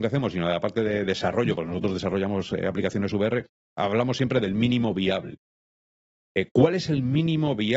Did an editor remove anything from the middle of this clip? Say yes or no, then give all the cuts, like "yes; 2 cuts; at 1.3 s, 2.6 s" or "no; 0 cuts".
no; 0 cuts